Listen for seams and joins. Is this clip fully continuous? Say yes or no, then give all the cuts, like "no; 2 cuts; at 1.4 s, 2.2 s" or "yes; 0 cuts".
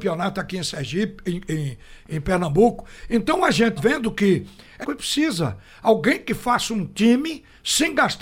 no; 2 cuts; at 3.8 s, 4.8 s